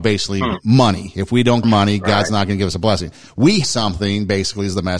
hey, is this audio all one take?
no; 2 cuts; at 1.6 s, 3.6 s

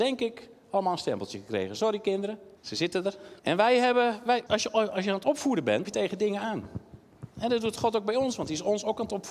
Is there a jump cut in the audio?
yes; 4 cuts; at 2.6 s, 3.4 s, 4.5 s, 5.8 s

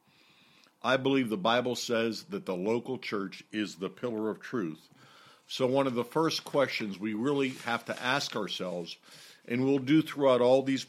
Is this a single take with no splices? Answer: yes; 0 cuts

